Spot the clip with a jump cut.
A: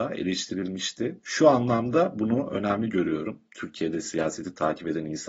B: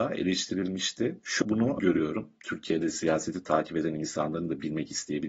B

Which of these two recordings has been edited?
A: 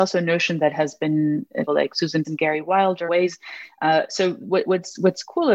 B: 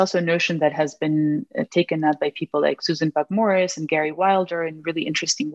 A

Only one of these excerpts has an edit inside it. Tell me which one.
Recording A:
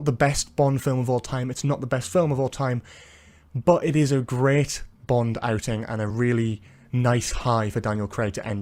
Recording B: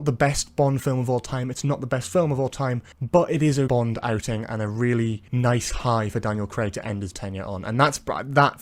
B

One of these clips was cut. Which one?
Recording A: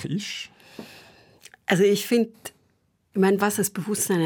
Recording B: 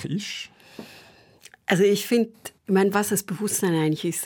B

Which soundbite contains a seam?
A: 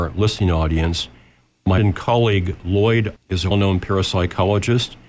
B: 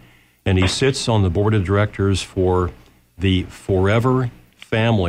A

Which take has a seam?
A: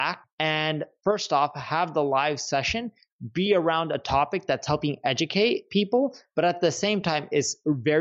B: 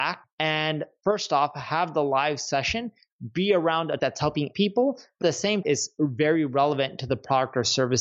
B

